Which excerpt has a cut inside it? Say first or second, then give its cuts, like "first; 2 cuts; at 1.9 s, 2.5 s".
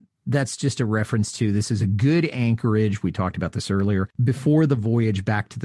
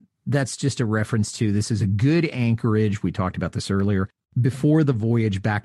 first; 1 cut; at 4.1 s